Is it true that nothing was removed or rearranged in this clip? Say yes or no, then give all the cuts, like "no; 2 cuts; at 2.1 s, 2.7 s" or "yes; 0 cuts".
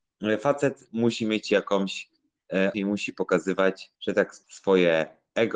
no; 3 cuts; at 2.7 s, 3.9 s, 4.4 s